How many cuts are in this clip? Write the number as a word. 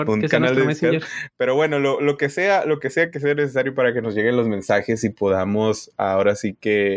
zero